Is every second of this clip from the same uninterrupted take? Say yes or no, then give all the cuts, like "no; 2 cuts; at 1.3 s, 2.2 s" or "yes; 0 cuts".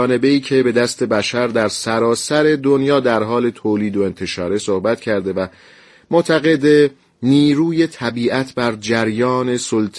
yes; 0 cuts